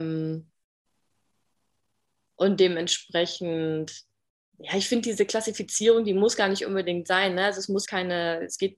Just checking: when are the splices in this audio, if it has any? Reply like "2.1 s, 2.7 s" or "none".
7.8 s